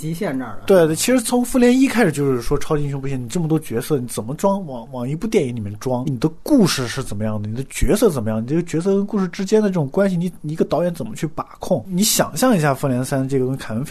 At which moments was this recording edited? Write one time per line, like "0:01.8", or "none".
0:06.0